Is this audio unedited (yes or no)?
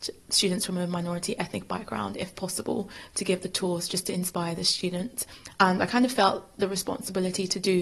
yes